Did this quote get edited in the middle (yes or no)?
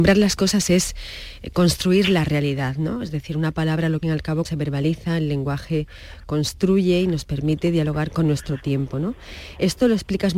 yes